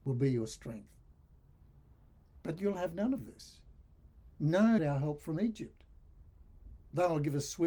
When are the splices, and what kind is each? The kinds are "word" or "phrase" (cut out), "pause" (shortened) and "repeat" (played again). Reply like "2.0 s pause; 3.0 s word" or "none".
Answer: 4.8 s phrase

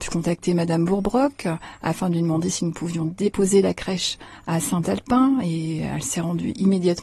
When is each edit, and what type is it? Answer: none

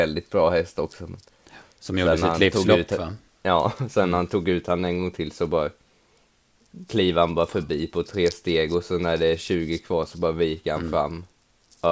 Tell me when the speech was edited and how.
none

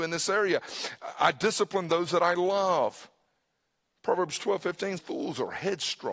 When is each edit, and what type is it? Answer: 5.0 s word

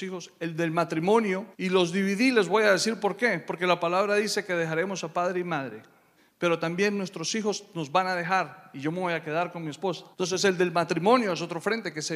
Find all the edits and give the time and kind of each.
1.5 s pause; 6.2 s pause; 10.1 s pause

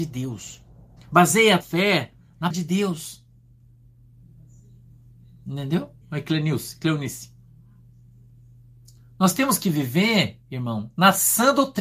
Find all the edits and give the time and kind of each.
1.0 s pause; 1.6 s word; 2.5 s word; 6.0 s pause

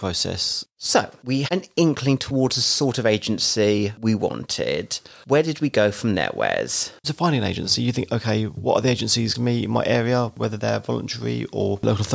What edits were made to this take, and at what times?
1.5 s word; 7.0 s phrase; 9.3 s word

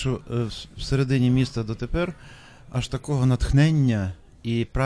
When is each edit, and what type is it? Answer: none

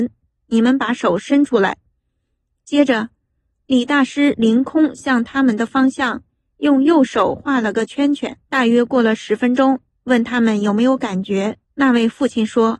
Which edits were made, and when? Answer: 8.4 s pause; 11.6 s pause

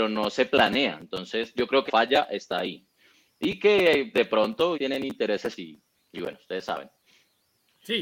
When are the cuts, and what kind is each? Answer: 1.9 s word; 4.1 s word; 4.7 s word; 5.6 s word

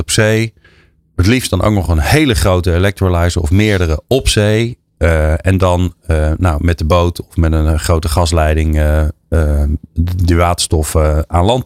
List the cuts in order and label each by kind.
none

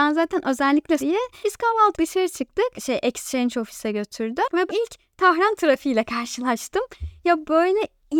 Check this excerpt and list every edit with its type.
1.0 s phrase; 1.9 s word; 2.8 s phrase; 4.7 s word

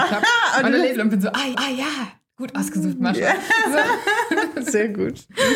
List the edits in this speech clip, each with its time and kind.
0.9 s phrase; 1.5 s repeat

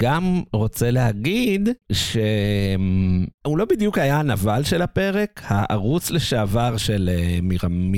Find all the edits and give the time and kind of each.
none

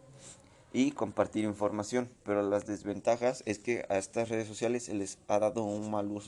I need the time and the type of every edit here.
2.2 s pause

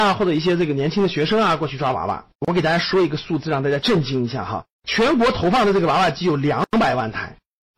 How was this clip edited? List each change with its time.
2.4 s pause; 4.7 s pause

